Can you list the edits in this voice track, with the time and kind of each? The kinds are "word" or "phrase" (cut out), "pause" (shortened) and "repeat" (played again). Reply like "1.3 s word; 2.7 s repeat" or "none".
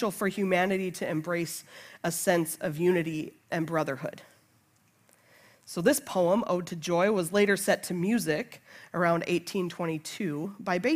none